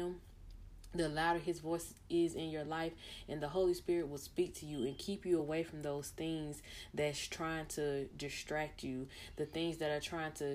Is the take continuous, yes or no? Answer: yes